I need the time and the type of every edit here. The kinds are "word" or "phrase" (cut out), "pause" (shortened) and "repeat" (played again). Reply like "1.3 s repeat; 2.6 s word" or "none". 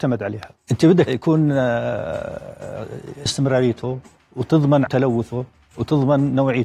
1.1 s word; 3.3 s phrase; 4.9 s word